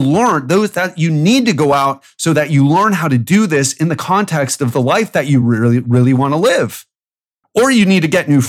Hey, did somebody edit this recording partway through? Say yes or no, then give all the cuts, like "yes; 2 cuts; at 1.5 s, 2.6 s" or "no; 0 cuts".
no; 0 cuts